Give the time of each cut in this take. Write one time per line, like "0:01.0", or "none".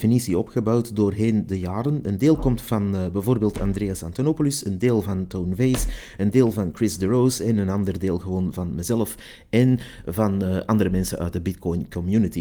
none